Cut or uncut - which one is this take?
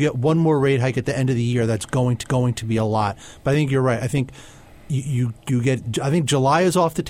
cut